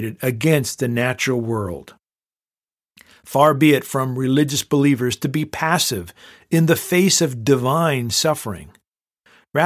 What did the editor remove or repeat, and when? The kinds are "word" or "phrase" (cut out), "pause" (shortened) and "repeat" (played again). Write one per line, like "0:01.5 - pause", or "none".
none